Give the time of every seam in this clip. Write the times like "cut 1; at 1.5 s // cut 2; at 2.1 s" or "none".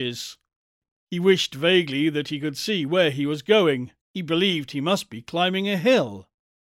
cut 1; at 4.0 s

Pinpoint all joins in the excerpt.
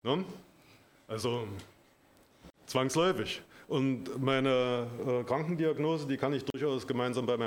none

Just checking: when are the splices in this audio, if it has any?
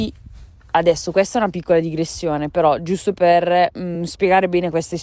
none

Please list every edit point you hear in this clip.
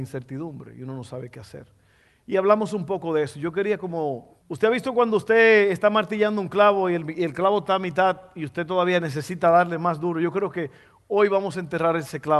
cut 1; at 4.4 s

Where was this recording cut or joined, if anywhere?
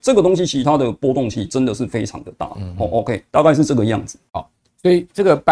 cut 1; at 3.3 s // cut 2; at 4.3 s

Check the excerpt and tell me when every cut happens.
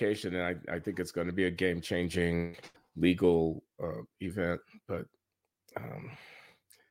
cut 1; at 2.8 s

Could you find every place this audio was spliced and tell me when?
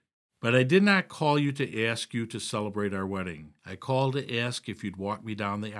cut 1; at 3.6 s

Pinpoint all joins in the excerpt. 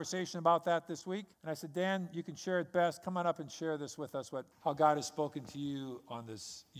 cut 1; at 1.3 s // cut 2; at 4.5 s

